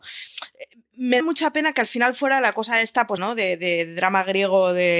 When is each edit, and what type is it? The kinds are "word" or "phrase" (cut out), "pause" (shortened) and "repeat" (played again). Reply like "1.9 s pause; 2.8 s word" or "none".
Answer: 1.2 s word; 3.2 s word